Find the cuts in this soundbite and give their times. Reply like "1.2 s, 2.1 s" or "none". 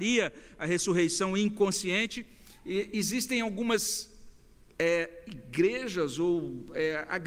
none